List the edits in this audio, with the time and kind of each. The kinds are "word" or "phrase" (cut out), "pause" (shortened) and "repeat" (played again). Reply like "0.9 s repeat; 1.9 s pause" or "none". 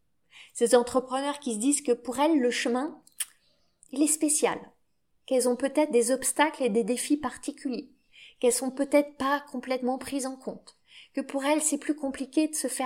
none